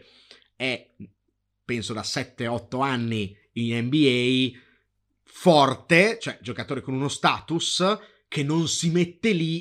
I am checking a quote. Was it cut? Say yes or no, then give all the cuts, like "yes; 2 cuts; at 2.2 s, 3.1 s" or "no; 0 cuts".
no; 0 cuts